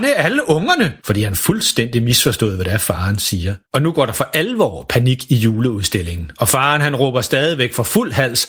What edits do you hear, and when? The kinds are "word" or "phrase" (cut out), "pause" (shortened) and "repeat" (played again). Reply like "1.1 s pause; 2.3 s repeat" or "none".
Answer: 1.0 s pause; 3.6 s pause